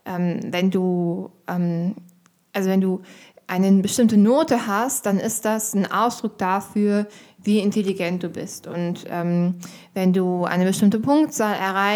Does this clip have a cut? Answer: no; 0 cuts

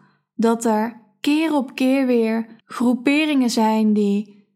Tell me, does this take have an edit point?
yes; 1 cut; at 2.6 s

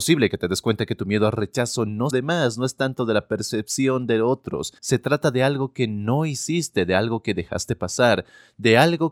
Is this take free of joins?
no; 2 cuts; at 2.1 s, 4.8 s

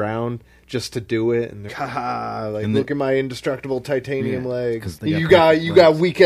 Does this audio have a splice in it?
yes; 2 cuts; at 1.7 s, 5.0 s

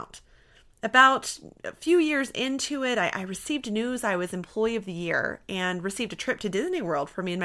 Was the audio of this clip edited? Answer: no; 0 cuts

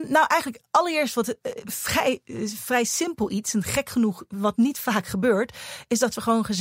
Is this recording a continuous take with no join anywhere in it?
yes; 0 cuts

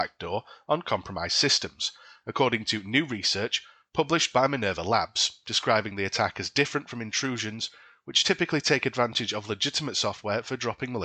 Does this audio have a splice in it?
no; 0 cuts

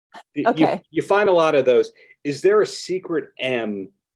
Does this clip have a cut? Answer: no; 0 cuts

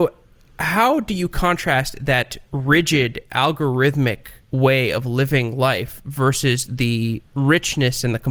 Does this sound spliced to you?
yes; 3 cuts; at 2.5 s, 4.4 s, 7.3 s

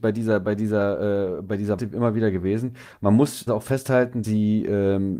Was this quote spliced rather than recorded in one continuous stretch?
yes; 3 cuts; at 1.8 s, 3.5 s, 4.2 s

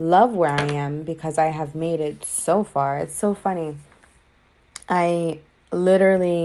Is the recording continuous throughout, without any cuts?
yes; 0 cuts

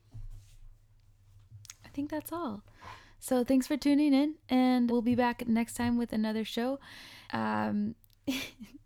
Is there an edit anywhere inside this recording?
yes; 2 cuts; at 4.9 s, 7.2 s

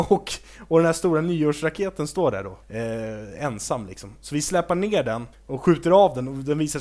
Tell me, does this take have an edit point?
yes; 2 cuts; at 2.6 s, 5.3 s

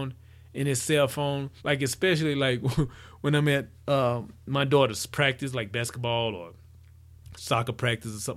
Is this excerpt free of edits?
no; 1 cut; at 1.6 s

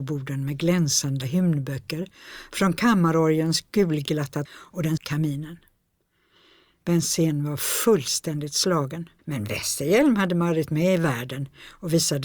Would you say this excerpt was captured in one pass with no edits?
no; 4 cuts; at 1.2 s, 4.4 s, 5.0 s, 9.2 s

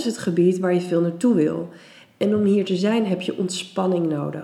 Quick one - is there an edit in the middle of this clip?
no; 0 cuts

